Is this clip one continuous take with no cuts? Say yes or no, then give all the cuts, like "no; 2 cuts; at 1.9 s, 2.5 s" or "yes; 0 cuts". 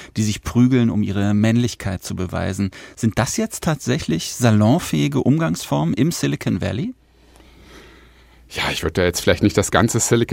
yes; 0 cuts